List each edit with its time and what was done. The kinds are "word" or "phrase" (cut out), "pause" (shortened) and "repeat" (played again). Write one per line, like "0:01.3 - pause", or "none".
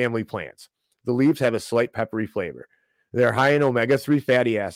none

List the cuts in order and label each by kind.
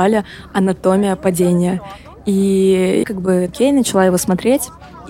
0:03.0 - word
0:03.5 - word

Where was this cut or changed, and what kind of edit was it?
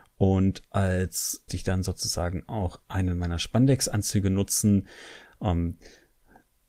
0:01.5 - phrase

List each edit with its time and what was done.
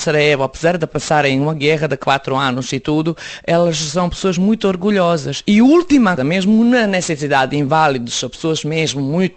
0:06.2 - word

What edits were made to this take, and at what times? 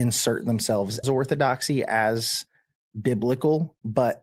0:01.0 - word

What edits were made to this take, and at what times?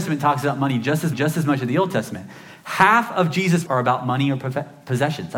0:01.1 - repeat
0:03.7 - word

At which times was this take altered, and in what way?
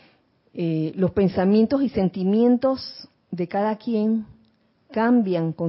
0:03.1 - pause

